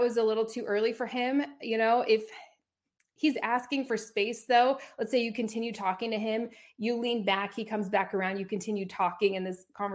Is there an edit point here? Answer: no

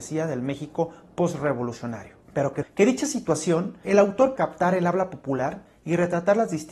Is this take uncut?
no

